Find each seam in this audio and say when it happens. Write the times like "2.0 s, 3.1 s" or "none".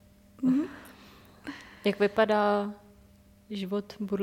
none

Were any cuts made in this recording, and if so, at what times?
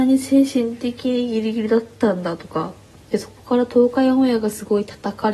none

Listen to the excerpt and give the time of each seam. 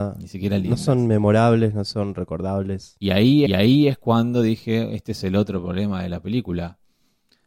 3.5 s

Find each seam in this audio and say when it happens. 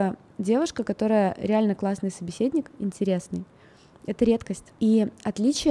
none

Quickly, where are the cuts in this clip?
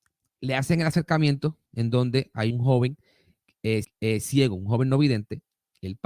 1.7 s, 2.5 s, 3.8 s

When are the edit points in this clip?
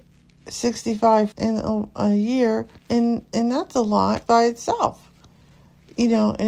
1.3 s, 2.8 s, 4.3 s

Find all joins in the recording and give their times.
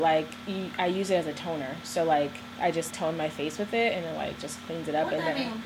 2.9 s

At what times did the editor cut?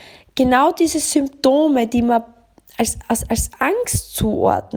none

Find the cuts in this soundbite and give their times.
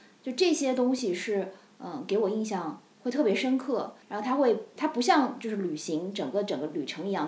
4.0 s, 4.8 s

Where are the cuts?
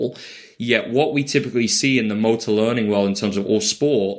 none

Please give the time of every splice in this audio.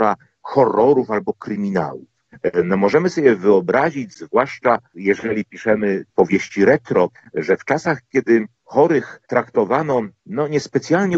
7.1 s, 9.2 s

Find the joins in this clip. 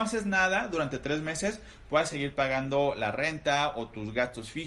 none

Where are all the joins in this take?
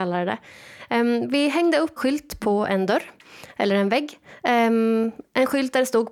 2.0 s

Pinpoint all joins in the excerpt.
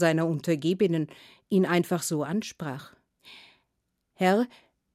none

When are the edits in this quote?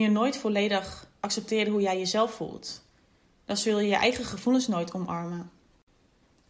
none

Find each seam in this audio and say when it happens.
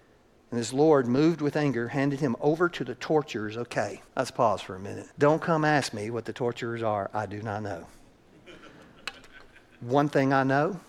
4.1 s, 5.1 s

